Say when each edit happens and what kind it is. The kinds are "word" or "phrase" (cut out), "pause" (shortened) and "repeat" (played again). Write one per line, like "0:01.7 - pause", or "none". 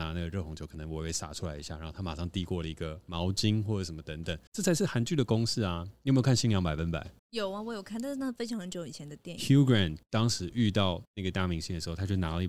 0:04.5 - pause
0:07.2 - pause
0:10.0 - pause
0:11.0 - pause